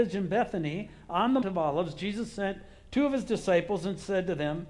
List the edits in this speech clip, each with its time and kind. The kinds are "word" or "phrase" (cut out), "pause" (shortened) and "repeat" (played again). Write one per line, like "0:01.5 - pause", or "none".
0:01.4 - word